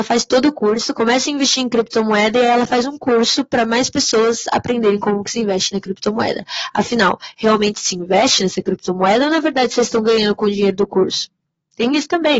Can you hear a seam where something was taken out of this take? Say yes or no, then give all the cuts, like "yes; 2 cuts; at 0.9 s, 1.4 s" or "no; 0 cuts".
no; 0 cuts